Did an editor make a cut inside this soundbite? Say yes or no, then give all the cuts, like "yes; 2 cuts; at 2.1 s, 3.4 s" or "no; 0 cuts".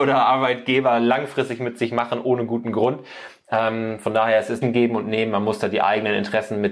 yes; 1 cut; at 4.6 s